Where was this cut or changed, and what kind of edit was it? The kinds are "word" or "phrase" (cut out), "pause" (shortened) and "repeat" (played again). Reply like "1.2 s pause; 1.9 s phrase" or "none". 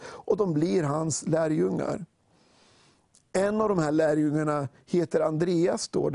none